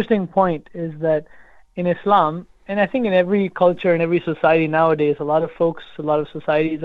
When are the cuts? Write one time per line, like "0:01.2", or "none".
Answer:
none